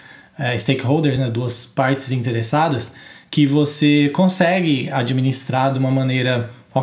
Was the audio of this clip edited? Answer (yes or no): no